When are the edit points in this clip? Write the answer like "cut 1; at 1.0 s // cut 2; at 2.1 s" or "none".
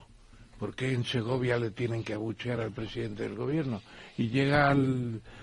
none